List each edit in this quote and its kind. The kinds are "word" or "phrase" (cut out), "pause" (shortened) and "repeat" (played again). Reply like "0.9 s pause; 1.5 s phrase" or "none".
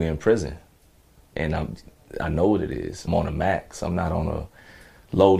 3.1 s phrase